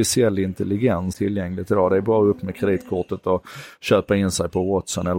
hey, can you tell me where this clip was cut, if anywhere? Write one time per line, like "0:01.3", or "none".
0:01.1